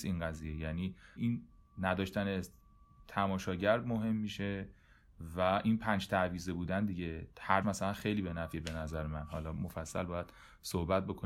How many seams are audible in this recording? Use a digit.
3